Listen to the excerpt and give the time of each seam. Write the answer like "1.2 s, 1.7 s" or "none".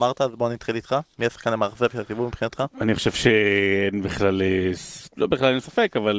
none